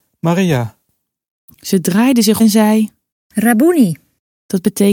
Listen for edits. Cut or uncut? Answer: cut